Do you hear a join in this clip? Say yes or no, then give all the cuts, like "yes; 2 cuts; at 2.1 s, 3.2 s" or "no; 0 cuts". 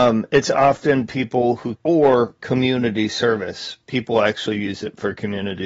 yes; 1 cut; at 1.7 s